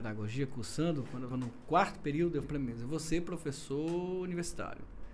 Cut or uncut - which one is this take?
cut